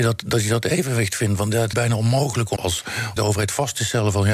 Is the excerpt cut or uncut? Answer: cut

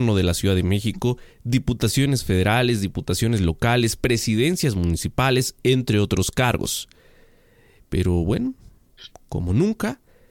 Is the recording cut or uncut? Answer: uncut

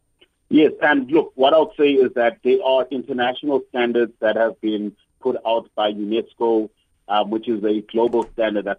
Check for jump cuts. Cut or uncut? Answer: uncut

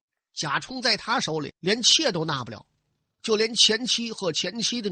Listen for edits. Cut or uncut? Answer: cut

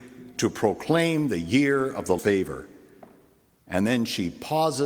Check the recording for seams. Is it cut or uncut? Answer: cut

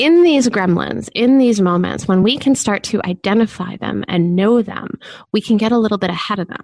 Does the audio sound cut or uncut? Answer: uncut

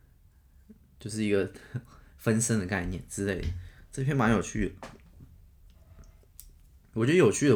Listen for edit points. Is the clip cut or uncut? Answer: uncut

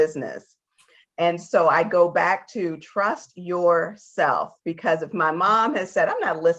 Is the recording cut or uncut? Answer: uncut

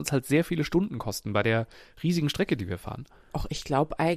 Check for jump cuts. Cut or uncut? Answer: uncut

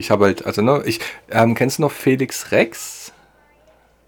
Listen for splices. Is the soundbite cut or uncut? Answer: uncut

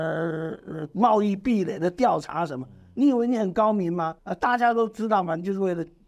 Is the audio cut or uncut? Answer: cut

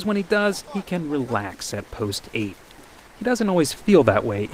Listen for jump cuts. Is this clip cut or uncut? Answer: uncut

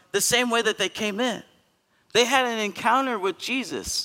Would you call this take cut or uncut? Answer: uncut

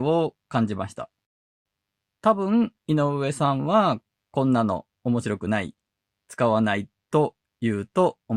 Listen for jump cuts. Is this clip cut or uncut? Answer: uncut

